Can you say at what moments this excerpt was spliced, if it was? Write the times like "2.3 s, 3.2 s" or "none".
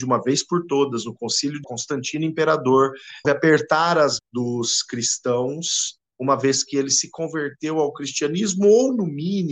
1.6 s, 3.2 s, 4.2 s